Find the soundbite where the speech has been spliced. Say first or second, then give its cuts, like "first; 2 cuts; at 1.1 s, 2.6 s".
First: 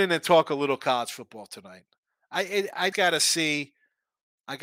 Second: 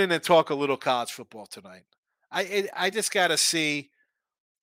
first; 1 cut; at 2.9 s